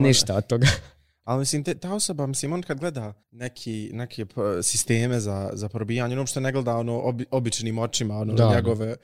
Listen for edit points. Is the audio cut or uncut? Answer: cut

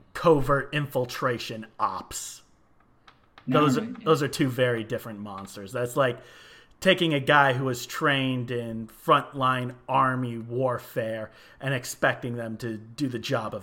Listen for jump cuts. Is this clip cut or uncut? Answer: uncut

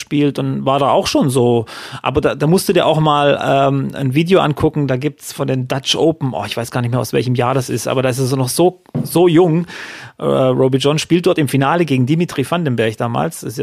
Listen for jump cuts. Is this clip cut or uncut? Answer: uncut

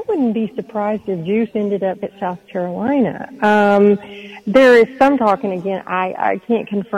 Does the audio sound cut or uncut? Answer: cut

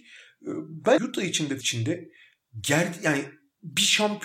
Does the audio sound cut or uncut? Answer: cut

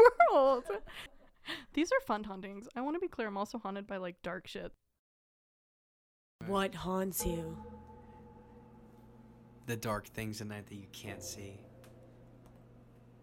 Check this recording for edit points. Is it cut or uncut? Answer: uncut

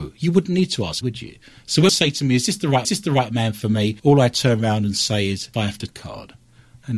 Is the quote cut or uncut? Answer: cut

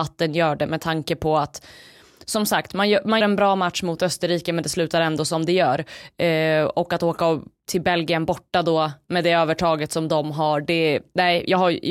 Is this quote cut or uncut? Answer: cut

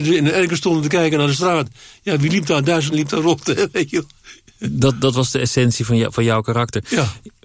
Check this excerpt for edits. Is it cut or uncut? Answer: cut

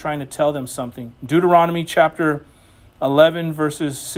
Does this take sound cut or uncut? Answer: cut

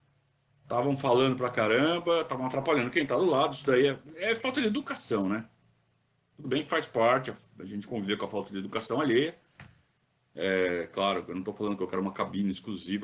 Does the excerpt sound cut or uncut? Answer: uncut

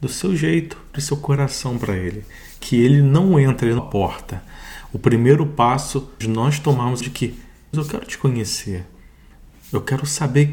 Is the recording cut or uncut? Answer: cut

